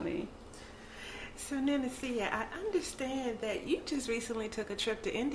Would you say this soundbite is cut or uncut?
uncut